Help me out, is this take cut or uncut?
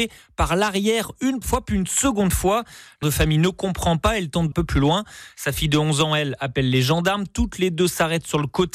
cut